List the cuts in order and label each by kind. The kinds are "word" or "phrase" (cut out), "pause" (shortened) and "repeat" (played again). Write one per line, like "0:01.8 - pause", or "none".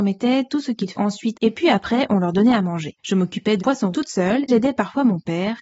0:00.9 - word
0:01.3 - phrase
0:03.0 - pause
0:03.6 - word
0:03.9 - word
0:04.5 - word